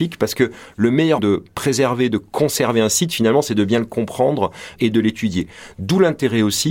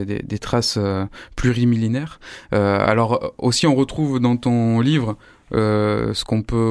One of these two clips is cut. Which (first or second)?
first